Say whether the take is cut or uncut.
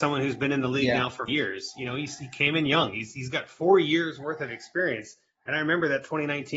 cut